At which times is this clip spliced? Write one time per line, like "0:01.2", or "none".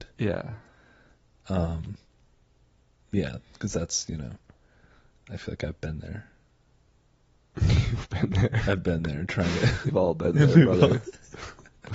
0:09.9